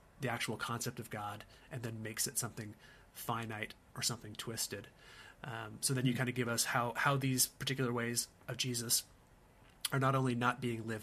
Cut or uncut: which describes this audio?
uncut